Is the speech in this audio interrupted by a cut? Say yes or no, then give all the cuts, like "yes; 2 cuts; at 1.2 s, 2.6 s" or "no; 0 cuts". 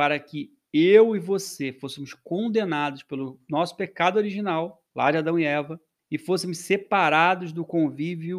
yes; 2 cuts; at 4.9 s, 6.0 s